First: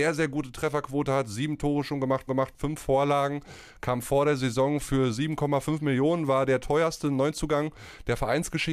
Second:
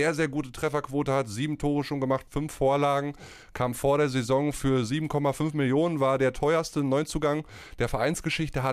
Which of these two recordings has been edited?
first; 1 cut; at 2.3 s

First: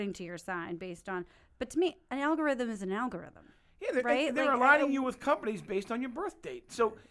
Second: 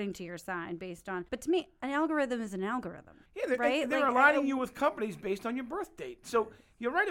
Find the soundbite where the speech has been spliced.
second; 2 cuts; at 1.3 s, 3.3 s

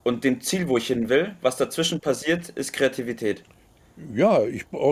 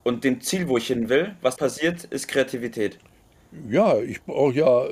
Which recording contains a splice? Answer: second; 1 cut; at 1.6 s

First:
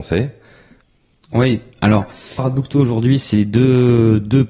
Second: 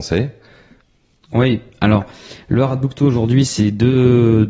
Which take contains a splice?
first; 1 cut; at 2.4 s

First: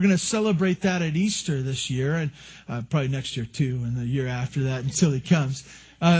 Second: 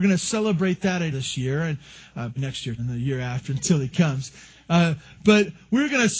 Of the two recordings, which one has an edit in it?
second; 4 cuts; at 1.1 s, 2.4 s, 2.8 s, 3.5 s

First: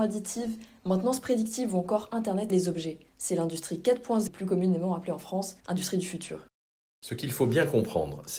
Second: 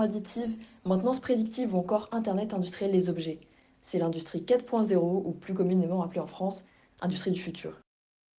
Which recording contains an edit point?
first; 5 cuts; at 2.5 s, 3.1 s, 4.3 s, 5.6 s, 6.6 s

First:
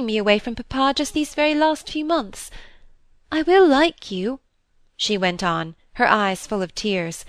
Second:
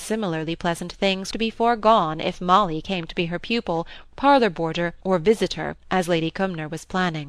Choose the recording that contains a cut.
second; 3 cuts; at 1.3 s, 5.0 s, 5.8 s

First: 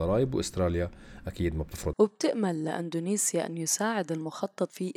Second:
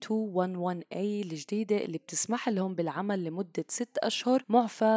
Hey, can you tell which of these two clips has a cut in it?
first; 1 cut; at 1.9 s

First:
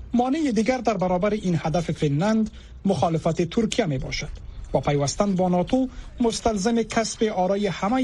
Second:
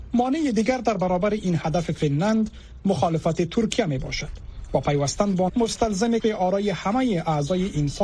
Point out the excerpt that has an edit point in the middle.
second; 2 cuts; at 5.5 s, 6.2 s

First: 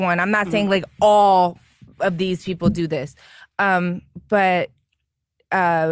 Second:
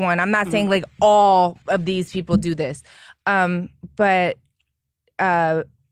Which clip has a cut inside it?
second; 1 cut; at 1.6 s

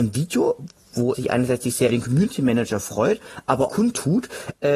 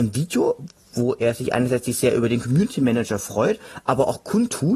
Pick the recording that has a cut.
first; 3 cuts; at 1.1 s, 1.9 s, 3.7 s

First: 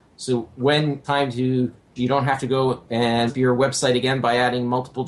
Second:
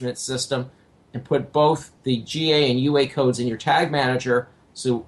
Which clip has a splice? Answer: first; 3 cuts; at 1.0 s, 2.0 s, 3.3 s

